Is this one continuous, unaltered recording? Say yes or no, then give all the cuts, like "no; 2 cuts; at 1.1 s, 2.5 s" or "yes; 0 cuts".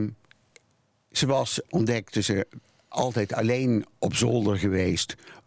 yes; 0 cuts